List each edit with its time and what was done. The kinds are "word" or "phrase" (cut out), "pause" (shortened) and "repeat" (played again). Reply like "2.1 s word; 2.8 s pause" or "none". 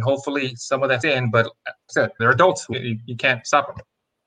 1.0 s word; 1.9 s word; 2.2 s word; 2.7 s word